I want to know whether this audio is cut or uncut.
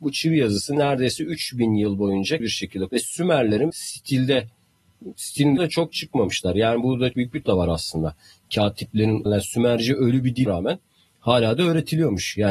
cut